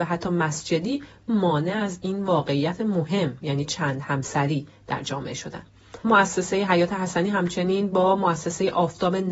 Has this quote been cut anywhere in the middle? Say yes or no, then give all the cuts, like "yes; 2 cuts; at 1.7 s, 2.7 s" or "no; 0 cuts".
yes; 1 cut; at 6.0 s